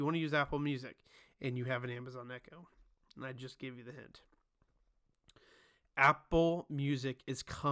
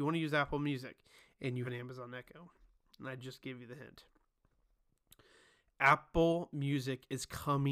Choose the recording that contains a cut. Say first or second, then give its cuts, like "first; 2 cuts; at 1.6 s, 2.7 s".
second; 1 cut; at 1.6 s